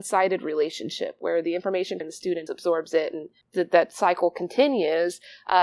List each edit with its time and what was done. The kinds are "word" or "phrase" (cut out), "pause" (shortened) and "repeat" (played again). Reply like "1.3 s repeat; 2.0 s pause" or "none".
2.0 s phrase; 2.5 s word; 3.4 s pause